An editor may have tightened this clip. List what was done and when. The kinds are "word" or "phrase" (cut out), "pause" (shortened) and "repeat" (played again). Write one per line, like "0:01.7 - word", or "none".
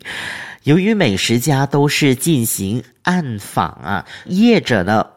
0:04.2 - phrase